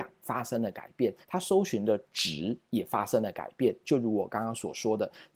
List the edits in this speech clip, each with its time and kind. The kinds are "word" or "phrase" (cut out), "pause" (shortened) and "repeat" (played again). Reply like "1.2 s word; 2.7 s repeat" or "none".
1.2 s pause

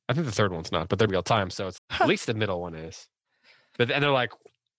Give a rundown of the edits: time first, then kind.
1.1 s word; 1.8 s word

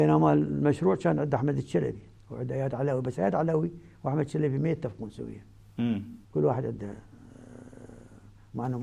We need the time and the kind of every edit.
2.2 s pause; 6.2 s pause

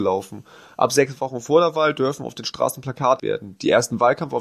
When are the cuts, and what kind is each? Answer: 3.2 s word

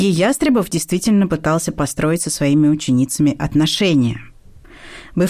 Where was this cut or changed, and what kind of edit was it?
none

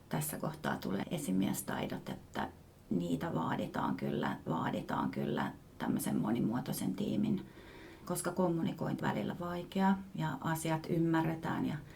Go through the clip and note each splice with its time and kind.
1.0 s word; 4.5 s repeat; 8.0 s word; 9.0 s word

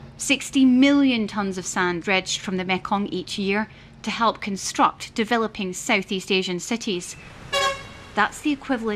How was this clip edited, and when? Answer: 2.0 s word

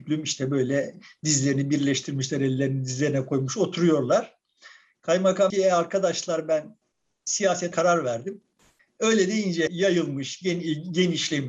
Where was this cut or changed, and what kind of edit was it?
5.5 s word; 7.7 s word; 9.7 s word

